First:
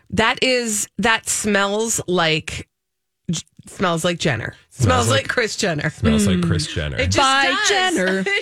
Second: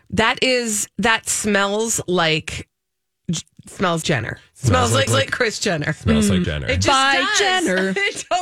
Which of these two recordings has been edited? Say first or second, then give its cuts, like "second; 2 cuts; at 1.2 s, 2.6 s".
second; 3 cuts; at 4.0 s, 5.1 s, 6.4 s